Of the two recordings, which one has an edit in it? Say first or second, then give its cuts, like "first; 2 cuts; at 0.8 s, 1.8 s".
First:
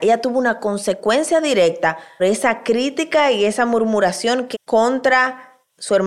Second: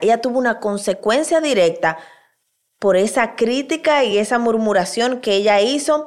first; 2 cuts; at 2.2 s, 4.5 s